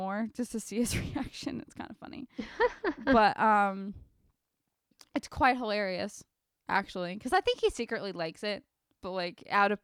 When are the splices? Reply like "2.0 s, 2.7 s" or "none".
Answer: none